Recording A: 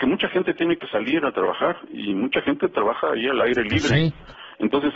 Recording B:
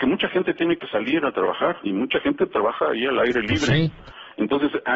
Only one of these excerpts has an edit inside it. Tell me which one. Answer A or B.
B